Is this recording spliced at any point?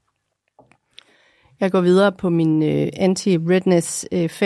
no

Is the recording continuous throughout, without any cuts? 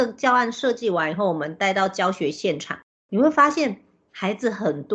yes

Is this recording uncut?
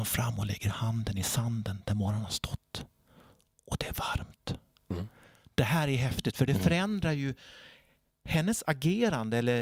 yes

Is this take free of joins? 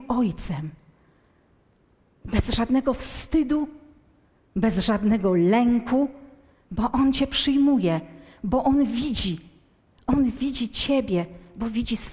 yes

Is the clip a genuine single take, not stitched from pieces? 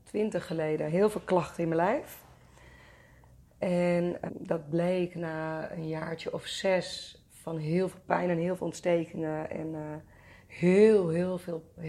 no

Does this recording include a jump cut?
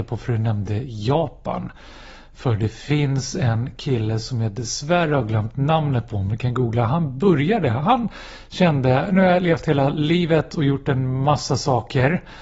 no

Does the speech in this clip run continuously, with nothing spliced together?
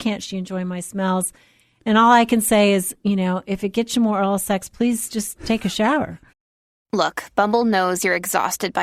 yes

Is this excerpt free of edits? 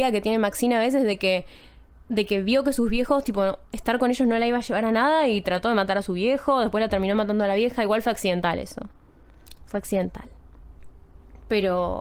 yes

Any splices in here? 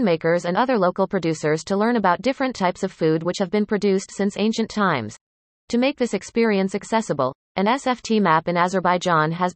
no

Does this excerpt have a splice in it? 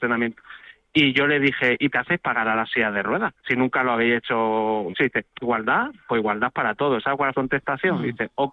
yes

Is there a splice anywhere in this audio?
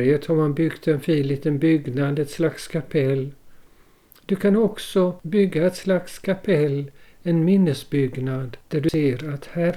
no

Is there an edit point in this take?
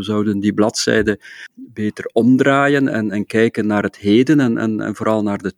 no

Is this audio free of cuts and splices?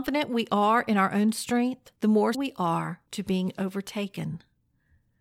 no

